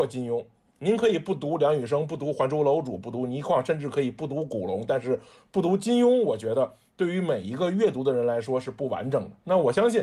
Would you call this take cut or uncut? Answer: uncut